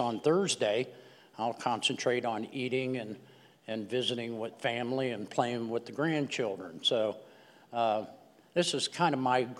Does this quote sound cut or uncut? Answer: uncut